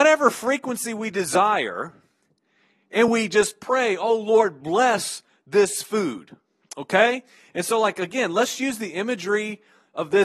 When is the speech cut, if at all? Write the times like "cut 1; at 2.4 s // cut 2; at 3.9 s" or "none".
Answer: none